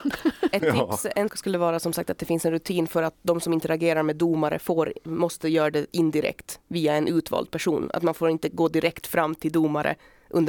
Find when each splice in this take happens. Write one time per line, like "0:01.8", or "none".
0:01.3